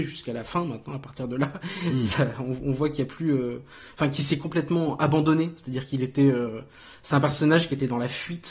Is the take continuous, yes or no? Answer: yes